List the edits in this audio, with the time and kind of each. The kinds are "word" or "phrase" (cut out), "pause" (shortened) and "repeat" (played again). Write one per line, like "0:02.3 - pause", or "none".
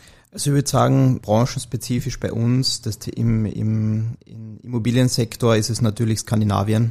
0:01.2 - word